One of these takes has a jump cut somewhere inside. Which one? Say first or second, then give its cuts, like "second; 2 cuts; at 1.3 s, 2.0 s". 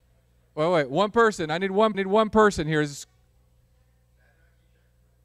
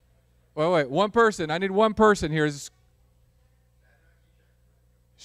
first; 1 cut; at 1.9 s